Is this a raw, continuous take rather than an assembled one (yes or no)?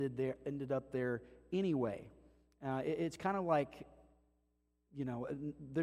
yes